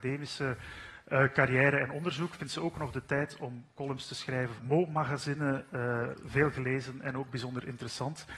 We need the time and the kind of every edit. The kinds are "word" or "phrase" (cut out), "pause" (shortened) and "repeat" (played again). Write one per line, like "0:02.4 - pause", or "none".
0:04.6 - word